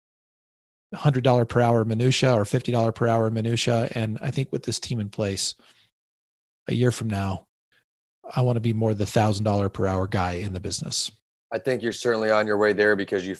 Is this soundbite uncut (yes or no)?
yes